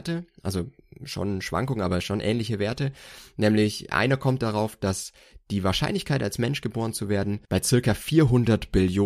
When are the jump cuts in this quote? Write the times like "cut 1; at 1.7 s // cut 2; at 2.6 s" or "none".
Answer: cut 1; at 7.4 s

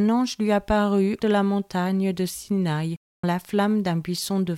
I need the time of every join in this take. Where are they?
cut 1; at 1.2 s // cut 2; at 3.2 s

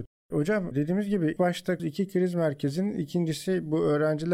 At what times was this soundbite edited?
cut 1; at 1.4 s // cut 2; at 1.8 s

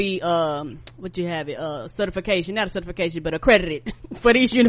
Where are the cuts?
none

